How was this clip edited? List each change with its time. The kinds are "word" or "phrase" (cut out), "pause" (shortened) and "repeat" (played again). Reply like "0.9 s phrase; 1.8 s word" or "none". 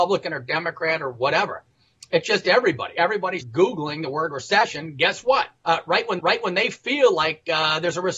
3.4 s word; 5.6 s pause; 6.2 s repeat